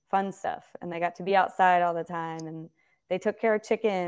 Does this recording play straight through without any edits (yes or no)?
yes